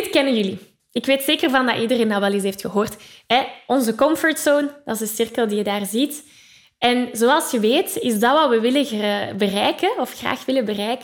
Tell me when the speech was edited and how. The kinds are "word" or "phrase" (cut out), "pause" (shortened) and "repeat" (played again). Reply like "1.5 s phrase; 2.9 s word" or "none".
none